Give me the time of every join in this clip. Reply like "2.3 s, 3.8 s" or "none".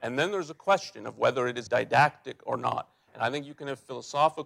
1.7 s